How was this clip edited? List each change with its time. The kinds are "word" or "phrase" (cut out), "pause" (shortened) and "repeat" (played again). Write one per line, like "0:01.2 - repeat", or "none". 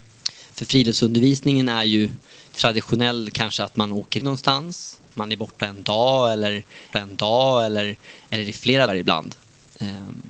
0:02.5 - pause
0:04.2 - word
0:06.9 - repeat
0:08.9 - word